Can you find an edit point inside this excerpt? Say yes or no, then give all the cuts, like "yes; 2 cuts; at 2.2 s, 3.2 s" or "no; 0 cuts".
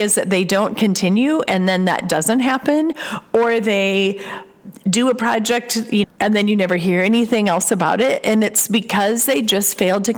yes; 1 cut; at 6.0 s